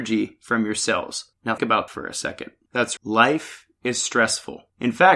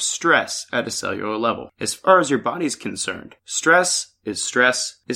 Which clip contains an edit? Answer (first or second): first